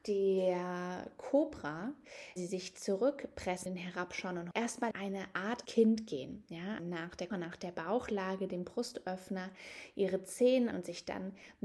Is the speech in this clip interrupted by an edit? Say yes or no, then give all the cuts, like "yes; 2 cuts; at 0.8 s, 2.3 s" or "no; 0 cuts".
yes; 9 cuts; at 2.4 s, 3.7 s, 4.5 s, 4.9 s, 5.7 s, 6.8 s, 7.3 s, 8.6 s, 10.7 s